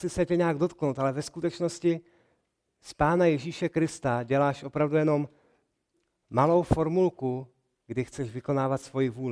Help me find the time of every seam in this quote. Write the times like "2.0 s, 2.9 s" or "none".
none